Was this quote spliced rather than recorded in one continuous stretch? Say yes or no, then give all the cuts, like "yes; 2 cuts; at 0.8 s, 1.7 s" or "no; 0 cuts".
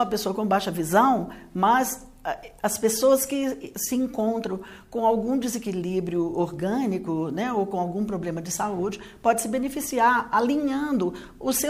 no; 0 cuts